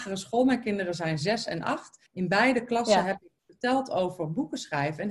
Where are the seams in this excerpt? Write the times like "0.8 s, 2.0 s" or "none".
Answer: 2.1 s